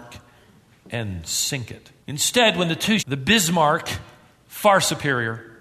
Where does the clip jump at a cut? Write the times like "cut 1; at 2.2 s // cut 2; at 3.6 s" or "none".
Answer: cut 1; at 2.0 s // cut 2; at 3.0 s